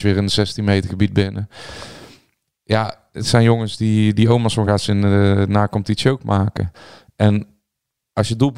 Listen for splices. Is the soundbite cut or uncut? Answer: uncut